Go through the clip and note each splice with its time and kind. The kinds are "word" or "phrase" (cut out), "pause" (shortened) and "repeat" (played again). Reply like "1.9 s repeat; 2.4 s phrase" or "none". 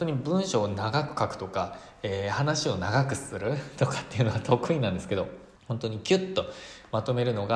5.6 s pause